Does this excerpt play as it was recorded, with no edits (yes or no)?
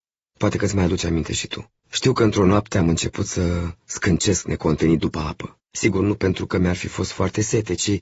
no